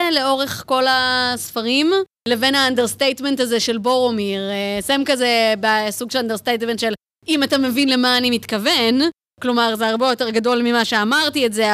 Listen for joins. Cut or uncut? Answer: uncut